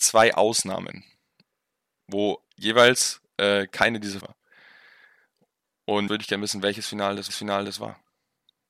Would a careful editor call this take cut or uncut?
cut